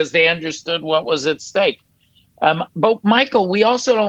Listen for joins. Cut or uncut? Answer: uncut